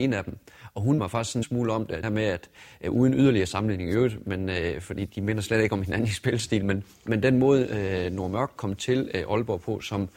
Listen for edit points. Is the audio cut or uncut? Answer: cut